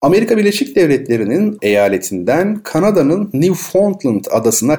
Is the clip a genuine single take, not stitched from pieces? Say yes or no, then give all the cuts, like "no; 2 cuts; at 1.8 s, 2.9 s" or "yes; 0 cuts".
no; 1 cut; at 1.6 s